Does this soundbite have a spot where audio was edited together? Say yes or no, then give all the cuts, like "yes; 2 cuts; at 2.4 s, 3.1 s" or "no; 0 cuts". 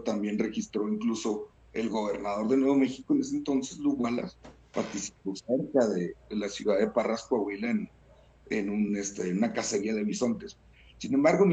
no; 0 cuts